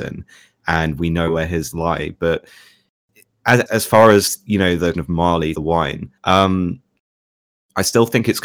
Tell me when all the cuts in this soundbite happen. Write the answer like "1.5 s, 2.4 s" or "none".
1.7 s, 3.7 s, 4.9 s, 5.5 s, 6.2 s